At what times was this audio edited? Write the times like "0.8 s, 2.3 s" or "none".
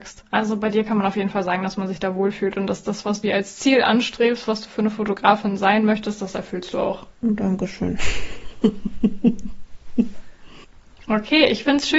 3.2 s, 7.1 s